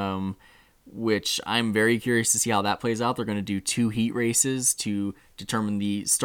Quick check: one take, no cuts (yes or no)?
yes